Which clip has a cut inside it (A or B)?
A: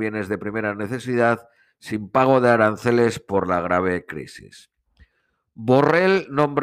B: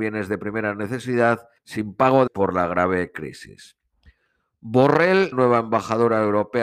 B